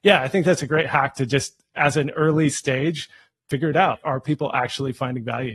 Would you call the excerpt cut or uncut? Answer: uncut